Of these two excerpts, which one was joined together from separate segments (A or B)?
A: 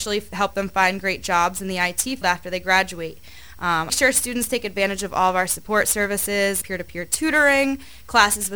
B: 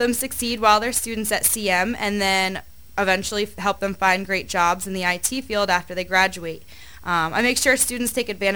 A